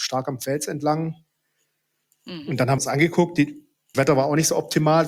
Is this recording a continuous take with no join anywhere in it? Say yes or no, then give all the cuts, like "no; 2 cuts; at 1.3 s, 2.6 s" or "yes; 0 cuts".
no; 2 cuts; at 2.8 s, 3.9 s